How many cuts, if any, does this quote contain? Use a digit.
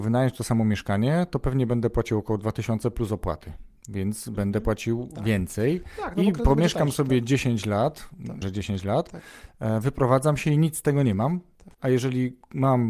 3